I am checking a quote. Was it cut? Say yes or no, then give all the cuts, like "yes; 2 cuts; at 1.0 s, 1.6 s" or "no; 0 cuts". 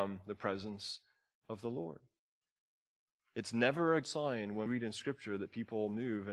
yes; 2 cuts; at 4.0 s, 4.7 s